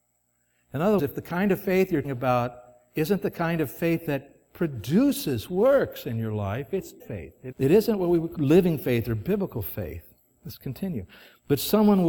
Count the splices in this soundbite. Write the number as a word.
five